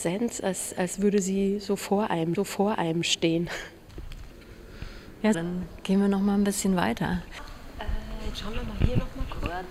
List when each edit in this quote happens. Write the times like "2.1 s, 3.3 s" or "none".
2.4 s, 5.3 s

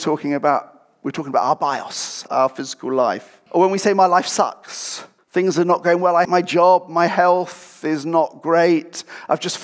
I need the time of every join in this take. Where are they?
2.3 s, 3.5 s, 5.2 s, 6.2 s

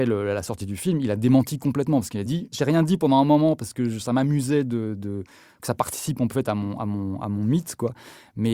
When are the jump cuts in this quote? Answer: none

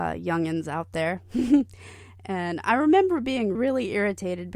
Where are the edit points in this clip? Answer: 3.5 s

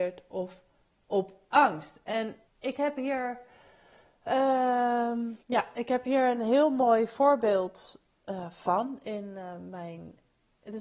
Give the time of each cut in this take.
2.5 s, 5.4 s

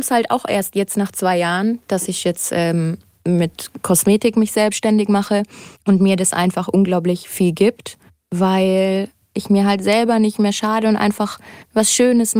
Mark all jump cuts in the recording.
none

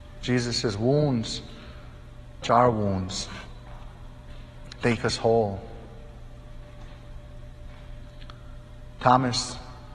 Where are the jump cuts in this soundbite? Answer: 2.4 s, 5.0 s

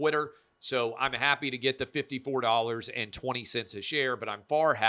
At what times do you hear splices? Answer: none

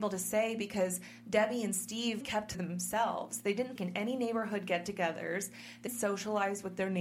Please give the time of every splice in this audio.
2.2 s, 2.5 s, 3.8 s, 5.9 s

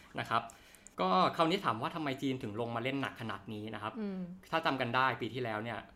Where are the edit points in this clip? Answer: 0.9 s

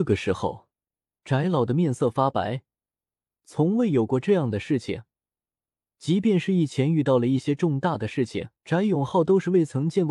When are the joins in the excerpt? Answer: 8.5 s

